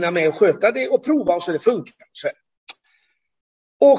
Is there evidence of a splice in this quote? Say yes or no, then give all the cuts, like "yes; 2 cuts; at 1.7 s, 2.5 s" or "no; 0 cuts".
no; 0 cuts